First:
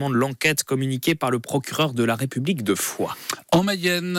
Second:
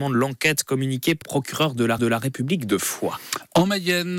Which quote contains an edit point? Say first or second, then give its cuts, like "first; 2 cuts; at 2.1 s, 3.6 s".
second; 2 cuts; at 1.2 s, 2.0 s